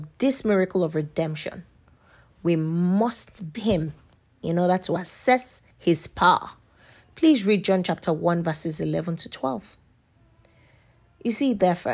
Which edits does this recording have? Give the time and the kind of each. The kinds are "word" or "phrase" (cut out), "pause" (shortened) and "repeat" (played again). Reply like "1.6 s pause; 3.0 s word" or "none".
3.5 s word; 5.7 s pause